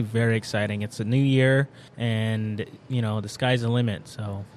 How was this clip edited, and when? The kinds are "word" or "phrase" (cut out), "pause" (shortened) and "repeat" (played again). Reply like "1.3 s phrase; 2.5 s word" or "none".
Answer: 1.9 s pause